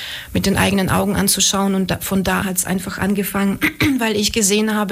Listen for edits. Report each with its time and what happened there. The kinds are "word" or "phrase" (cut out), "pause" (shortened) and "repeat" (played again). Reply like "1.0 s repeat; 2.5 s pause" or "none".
2.4 s word